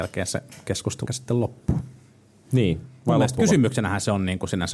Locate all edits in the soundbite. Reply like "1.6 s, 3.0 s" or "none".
1.1 s